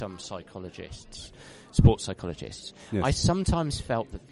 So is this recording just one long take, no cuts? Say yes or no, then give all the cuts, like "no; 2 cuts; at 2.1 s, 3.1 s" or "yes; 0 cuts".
yes; 0 cuts